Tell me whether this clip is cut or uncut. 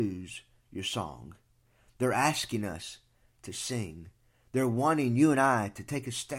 uncut